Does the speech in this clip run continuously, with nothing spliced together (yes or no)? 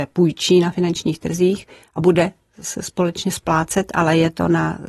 yes